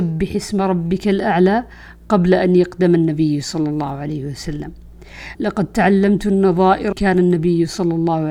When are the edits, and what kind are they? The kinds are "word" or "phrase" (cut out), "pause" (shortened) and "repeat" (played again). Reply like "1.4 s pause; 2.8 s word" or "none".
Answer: 5.3 s phrase; 6.9 s word